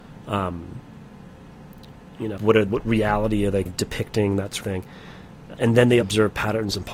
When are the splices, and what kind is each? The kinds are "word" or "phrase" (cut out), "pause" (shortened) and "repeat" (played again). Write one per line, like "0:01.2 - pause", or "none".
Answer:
0:02.4 - word
0:02.7 - word
0:03.7 - word
0:04.6 - word
0:05.6 - word
0:06.0 - word